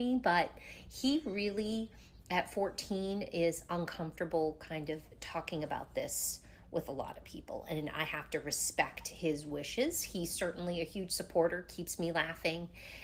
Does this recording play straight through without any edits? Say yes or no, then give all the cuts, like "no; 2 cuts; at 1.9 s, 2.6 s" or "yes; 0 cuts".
yes; 0 cuts